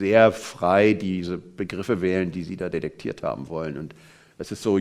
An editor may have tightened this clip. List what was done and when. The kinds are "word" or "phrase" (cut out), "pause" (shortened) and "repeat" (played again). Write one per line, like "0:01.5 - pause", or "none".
none